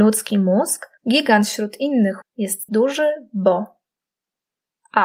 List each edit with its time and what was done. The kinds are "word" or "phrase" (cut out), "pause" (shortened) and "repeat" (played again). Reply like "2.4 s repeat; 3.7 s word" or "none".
1.0 s pause; 2.2 s word; 2.7 s word

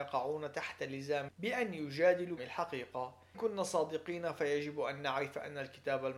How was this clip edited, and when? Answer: 1.3 s word; 2.4 s word; 3.3 s word

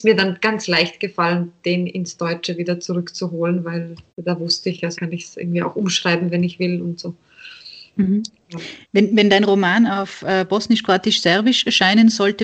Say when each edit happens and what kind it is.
4.1 s pause; 5.0 s word; 7.9 s pause; 8.8 s pause

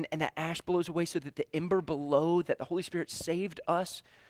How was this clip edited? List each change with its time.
none

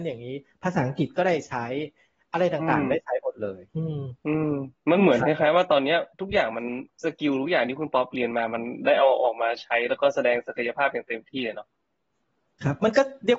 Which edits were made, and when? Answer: 3.7 s pause; 4.2 s pause; 6.1 s pause; 6.9 s pause

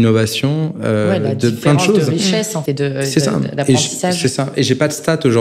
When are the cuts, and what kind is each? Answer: 2.7 s word

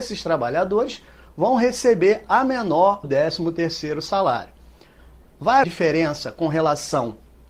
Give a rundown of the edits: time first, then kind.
3.0 s word; 5.6 s word

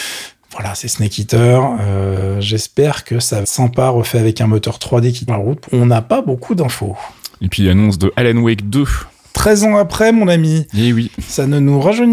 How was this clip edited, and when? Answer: 3.4 s word; 5.3 s word; 5.7 s word

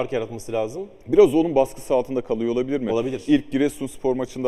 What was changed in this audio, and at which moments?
1.0 s pause

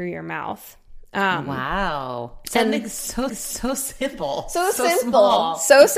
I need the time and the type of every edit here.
3.3 s repeat

